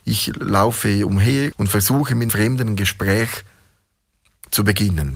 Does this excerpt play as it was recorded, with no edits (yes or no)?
no